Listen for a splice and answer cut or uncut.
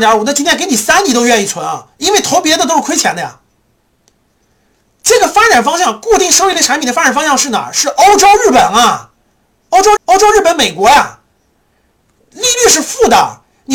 cut